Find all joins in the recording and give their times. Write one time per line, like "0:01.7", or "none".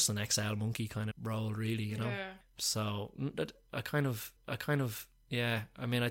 0:01.1
0:04.4